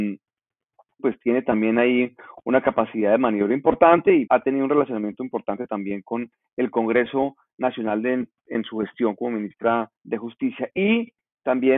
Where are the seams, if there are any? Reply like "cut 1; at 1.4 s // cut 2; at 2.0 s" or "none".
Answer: cut 1; at 1.0 s // cut 2; at 4.3 s // cut 3; at 10.0 s